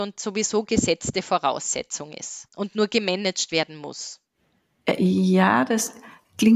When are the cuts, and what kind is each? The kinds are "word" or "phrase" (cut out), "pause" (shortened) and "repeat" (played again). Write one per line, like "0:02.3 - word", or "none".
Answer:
0:02.5 - pause